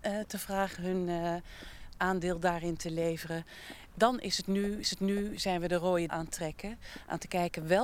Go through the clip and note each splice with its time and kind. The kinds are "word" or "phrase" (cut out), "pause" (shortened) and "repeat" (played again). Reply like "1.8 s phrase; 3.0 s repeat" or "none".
4.8 s repeat; 6.1 s word